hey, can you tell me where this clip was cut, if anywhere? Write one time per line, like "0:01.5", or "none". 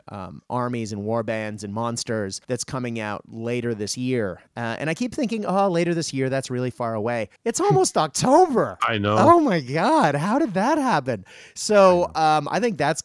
0:02.4
0:07.4
0:08.8